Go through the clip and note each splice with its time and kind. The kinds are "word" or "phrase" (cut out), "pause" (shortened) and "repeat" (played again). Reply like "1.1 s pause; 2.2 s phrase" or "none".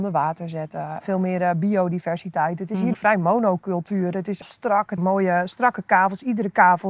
1.0 s word; 2.9 s word; 4.4 s word; 5.0 s word